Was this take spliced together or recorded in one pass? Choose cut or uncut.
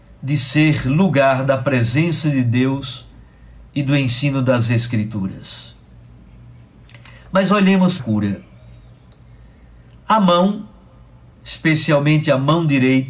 cut